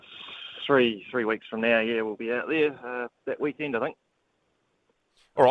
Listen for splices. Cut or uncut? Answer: cut